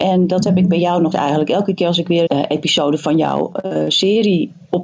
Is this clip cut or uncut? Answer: cut